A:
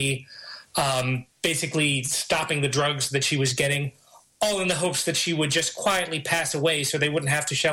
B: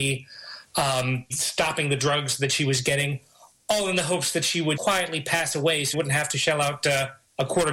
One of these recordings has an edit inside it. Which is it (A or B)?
B